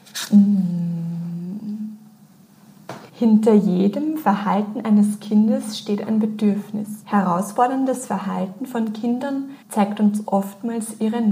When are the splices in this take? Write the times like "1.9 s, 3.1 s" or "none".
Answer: 3.1 s, 7.0 s, 9.6 s